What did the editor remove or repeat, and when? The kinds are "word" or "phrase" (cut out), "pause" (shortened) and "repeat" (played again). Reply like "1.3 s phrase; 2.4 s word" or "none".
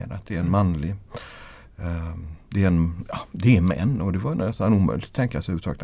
none